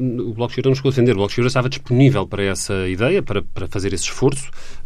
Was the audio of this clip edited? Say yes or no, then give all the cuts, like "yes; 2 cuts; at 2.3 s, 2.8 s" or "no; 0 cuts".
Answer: no; 0 cuts